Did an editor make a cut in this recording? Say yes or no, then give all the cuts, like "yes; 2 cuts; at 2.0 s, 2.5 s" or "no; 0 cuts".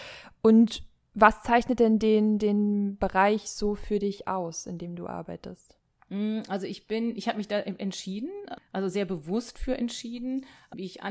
no; 0 cuts